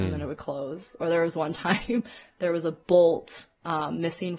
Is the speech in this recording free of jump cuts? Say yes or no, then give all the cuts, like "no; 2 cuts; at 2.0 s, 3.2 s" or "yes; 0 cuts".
yes; 0 cuts